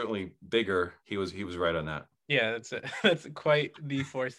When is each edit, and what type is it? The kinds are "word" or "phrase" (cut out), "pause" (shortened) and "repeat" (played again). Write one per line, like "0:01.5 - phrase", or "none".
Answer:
0:01.0 - pause